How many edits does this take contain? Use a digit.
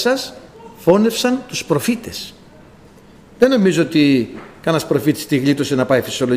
0